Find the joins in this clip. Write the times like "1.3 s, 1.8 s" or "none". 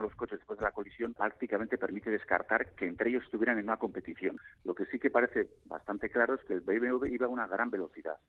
none